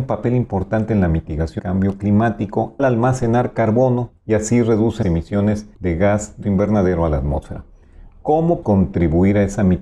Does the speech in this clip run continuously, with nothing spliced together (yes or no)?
no